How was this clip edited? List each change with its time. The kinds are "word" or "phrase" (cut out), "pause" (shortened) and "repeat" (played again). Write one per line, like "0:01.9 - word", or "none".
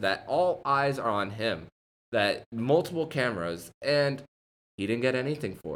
none